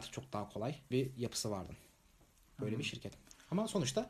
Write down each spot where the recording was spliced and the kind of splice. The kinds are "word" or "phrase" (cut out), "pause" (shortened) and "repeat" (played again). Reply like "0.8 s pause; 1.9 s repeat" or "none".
0.9 s word